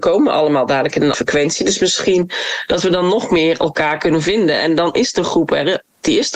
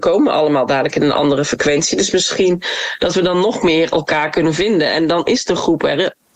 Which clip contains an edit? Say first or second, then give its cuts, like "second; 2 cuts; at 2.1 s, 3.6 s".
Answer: first; 1 cut; at 1.1 s